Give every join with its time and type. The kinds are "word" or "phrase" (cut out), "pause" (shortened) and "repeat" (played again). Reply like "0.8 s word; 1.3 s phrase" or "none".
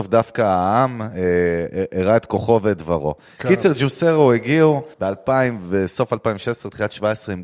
4.9 s pause